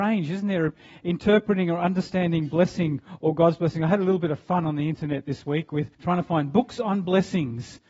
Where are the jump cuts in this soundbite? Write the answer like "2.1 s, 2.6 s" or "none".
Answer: 5.9 s